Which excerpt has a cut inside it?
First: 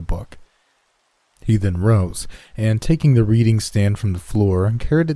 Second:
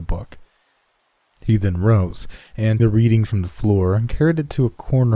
second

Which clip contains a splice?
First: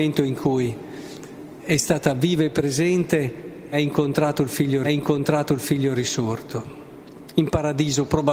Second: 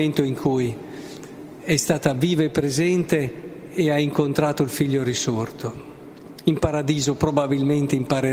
first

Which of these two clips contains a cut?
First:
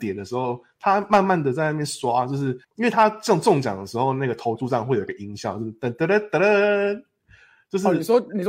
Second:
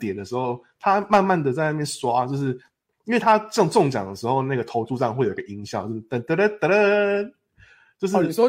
first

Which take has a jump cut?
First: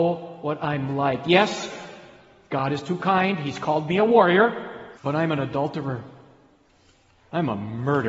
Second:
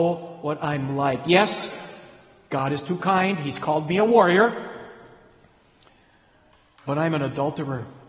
first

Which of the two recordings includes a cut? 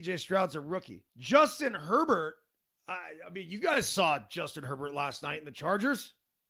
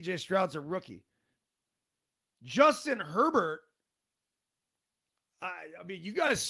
first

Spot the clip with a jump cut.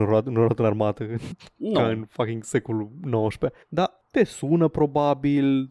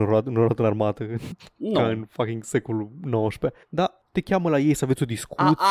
second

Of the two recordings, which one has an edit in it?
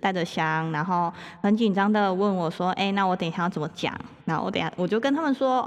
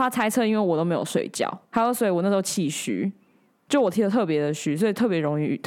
second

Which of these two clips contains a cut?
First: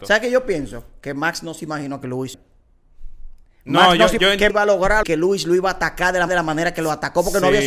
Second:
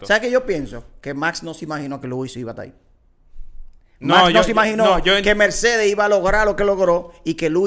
first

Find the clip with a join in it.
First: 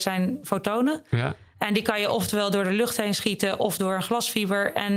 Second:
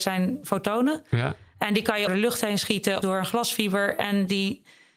second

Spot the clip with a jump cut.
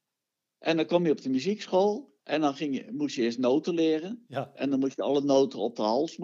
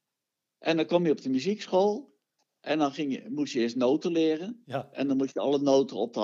first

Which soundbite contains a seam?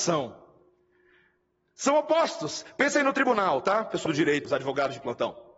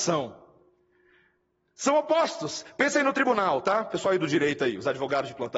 first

